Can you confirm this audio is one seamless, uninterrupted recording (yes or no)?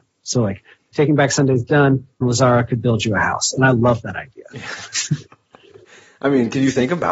no